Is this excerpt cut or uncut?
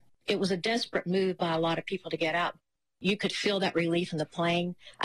uncut